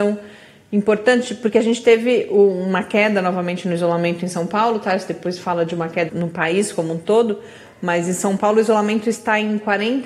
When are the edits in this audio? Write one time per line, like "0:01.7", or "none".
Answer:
0:06.1